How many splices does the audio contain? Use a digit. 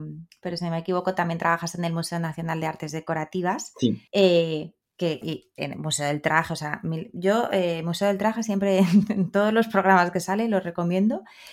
2